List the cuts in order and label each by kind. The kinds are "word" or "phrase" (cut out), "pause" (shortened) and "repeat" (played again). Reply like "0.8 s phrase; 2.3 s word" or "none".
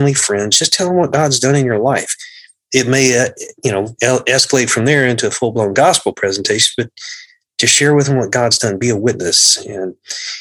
none